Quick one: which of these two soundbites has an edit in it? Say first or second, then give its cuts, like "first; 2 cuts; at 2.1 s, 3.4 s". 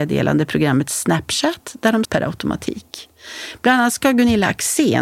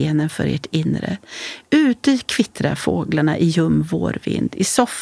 first; 1 cut; at 2.0 s